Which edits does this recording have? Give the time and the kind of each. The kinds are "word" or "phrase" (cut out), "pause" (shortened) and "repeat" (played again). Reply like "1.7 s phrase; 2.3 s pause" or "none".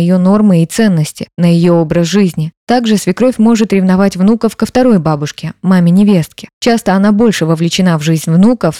none